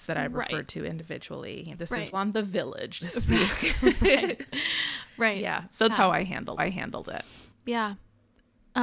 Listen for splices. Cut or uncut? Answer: cut